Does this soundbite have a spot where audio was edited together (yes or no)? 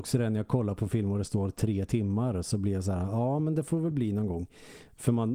no